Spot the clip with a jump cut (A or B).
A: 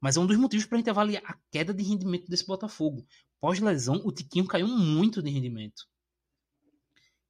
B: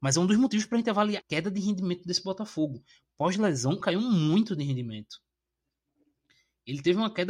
B